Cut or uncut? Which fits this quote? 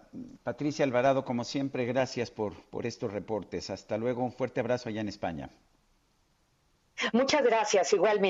uncut